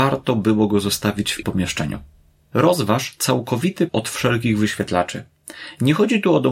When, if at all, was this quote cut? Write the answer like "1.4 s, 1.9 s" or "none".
1.4 s, 3.9 s